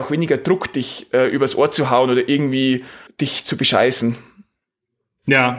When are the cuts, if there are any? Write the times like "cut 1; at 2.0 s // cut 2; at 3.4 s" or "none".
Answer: cut 1; at 3.1 s